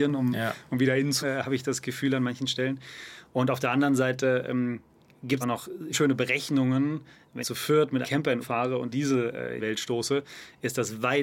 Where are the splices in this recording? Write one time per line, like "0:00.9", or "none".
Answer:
0:01.2
0:05.4
0:05.9
0:07.4
0:08.0
0:08.4
0:08.9
0:09.6